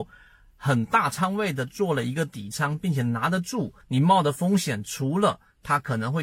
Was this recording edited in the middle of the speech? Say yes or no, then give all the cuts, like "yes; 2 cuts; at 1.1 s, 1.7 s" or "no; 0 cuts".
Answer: yes; 1 cut; at 3.8 s